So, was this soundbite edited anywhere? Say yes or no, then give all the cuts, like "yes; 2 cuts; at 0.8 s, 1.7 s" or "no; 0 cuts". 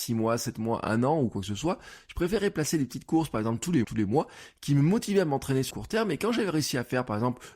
yes; 2 cuts; at 3.8 s, 5.7 s